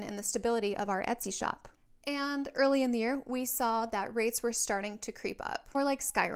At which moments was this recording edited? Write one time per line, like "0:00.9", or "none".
none